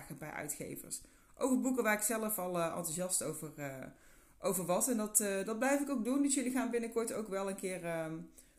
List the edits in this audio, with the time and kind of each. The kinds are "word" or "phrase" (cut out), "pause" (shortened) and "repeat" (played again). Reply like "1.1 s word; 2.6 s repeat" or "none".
none